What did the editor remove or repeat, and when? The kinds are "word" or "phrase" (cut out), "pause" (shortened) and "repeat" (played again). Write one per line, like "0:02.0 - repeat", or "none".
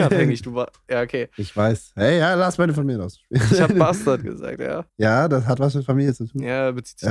0:04.9 - pause